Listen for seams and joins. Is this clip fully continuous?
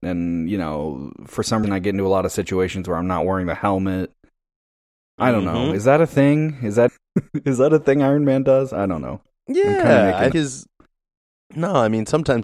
no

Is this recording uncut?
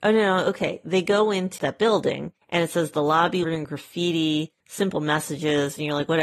no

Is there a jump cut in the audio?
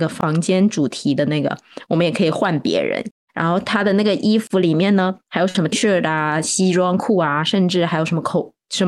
yes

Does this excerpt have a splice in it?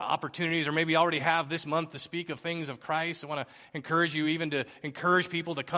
no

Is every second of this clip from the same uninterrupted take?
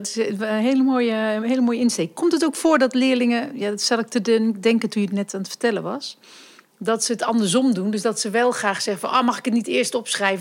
yes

